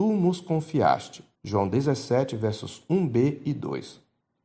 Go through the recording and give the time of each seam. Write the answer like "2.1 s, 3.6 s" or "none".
1.3 s